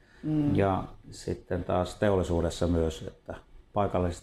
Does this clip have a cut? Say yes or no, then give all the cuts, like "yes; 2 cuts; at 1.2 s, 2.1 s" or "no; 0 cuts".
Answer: no; 0 cuts